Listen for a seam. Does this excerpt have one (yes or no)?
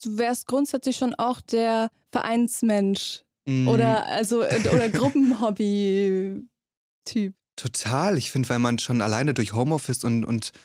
yes